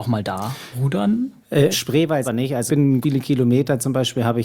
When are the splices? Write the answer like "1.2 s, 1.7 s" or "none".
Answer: 1.7 s, 2.2 s, 2.7 s, 3.0 s